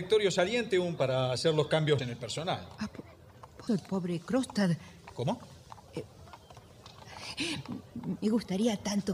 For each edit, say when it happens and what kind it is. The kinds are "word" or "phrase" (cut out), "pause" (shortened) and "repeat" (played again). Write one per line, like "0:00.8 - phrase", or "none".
0:01.0 - word
0:02.0 - word
0:03.7 - word
0:08.2 - word